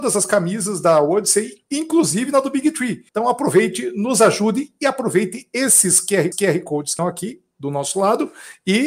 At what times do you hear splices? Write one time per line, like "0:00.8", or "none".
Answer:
0:03.1
0:06.3
0:07.0